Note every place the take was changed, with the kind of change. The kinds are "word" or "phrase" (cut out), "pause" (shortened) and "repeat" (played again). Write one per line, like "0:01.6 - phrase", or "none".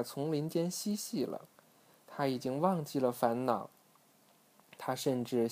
none

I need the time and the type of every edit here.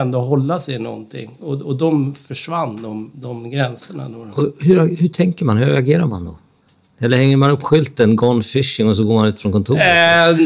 none

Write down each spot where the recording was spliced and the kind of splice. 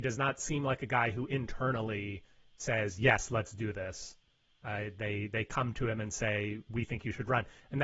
none

